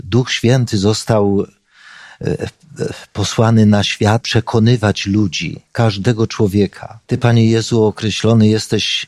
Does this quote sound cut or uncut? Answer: cut